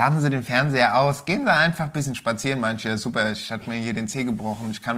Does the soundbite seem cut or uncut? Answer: uncut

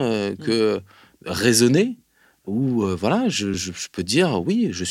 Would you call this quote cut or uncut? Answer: uncut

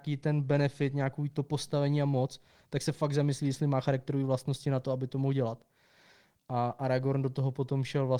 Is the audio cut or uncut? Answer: uncut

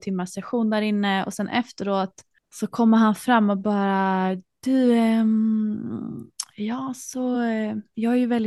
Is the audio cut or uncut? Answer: uncut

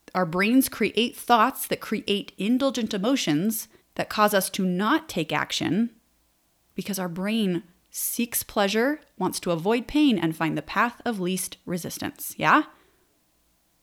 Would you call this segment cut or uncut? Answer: cut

